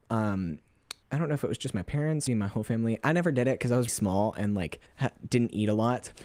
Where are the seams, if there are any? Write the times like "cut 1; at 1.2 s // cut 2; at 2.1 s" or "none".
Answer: cut 1; at 1.0 s // cut 2; at 2.3 s // cut 3; at 3.9 s // cut 4; at 4.9 s